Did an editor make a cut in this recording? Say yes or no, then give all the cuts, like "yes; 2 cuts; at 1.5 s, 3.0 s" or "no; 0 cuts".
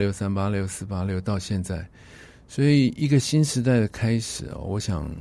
no; 0 cuts